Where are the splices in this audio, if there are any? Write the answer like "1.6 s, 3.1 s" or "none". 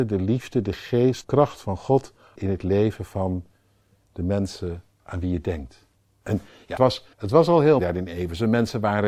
1.2 s, 2.4 s, 4.9 s, 6.0 s, 6.8 s, 7.1 s, 7.8 s